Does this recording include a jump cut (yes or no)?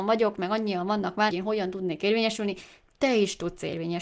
yes